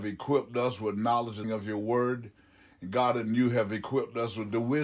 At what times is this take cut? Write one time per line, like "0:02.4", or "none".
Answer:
0:01.4

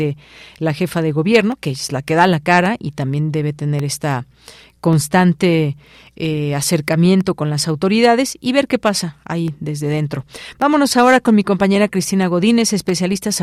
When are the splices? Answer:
none

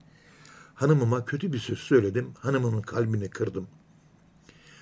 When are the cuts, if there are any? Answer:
none

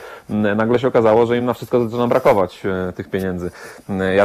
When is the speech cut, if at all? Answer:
none

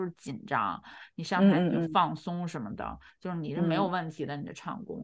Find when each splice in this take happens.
none

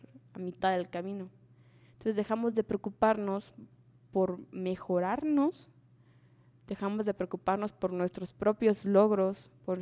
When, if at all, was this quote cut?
none

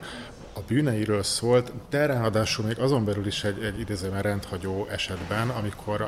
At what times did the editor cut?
none

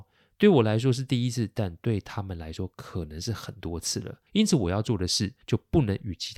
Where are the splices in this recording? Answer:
0:04.3
0:05.4

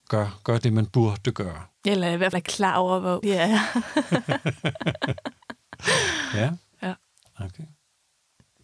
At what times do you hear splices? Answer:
0:01.7
0:02.3
0:03.2

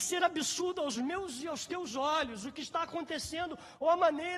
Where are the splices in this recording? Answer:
none

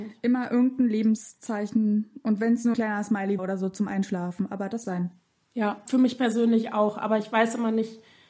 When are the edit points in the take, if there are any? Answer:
0:02.7
0:03.4
0:04.8
0:05.9

